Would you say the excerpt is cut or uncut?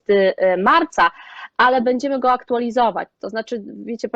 uncut